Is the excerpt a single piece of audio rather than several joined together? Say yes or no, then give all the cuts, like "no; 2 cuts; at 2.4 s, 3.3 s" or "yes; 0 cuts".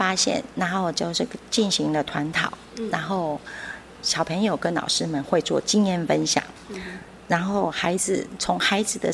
yes; 0 cuts